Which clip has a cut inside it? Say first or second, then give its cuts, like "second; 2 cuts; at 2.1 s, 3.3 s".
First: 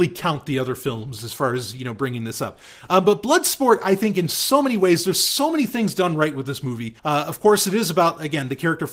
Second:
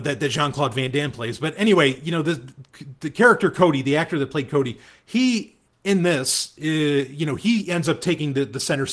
first; 1 cut; at 7.0 s